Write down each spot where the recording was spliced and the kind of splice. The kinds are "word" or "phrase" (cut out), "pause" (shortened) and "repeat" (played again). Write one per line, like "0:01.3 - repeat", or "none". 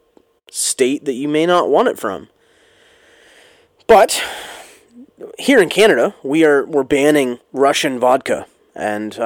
0:07.4 - pause